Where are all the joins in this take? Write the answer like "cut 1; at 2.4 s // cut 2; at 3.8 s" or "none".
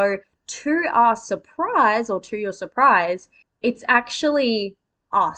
cut 1; at 3.4 s